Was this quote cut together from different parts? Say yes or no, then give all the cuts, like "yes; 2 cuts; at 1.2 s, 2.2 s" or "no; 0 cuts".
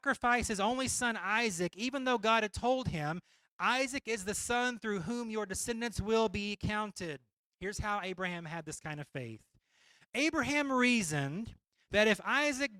no; 0 cuts